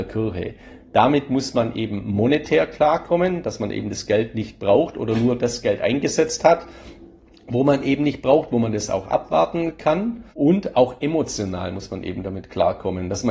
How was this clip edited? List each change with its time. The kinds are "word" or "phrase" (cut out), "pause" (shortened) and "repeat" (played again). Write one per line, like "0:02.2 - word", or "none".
0:10.3 - pause